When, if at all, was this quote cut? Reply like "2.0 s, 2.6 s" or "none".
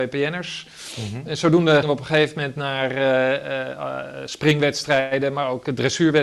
1.8 s